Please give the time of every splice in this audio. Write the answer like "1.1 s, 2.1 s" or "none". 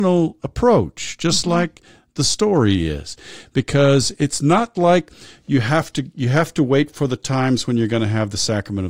none